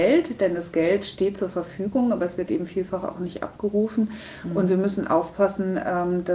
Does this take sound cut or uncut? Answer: uncut